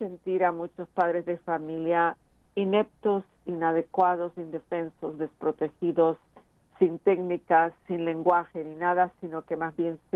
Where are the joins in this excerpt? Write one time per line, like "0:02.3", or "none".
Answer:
0:07.8